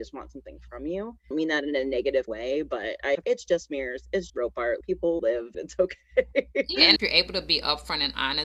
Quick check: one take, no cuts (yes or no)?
no